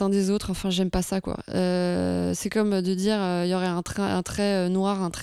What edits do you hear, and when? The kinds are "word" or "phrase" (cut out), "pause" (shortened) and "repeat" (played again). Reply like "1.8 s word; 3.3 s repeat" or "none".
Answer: none